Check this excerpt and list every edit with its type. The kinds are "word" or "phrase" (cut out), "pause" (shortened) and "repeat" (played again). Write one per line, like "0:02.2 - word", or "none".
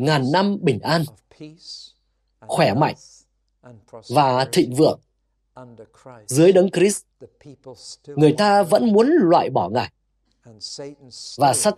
none